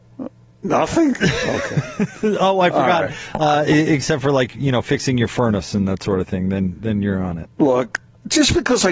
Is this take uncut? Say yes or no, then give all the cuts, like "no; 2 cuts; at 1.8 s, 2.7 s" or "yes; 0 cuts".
no; 1 cut; at 7.6 s